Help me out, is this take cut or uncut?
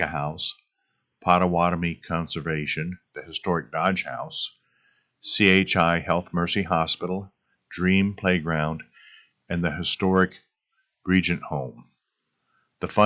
uncut